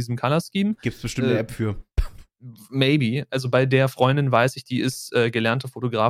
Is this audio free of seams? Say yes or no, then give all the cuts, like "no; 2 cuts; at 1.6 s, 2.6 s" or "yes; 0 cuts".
yes; 0 cuts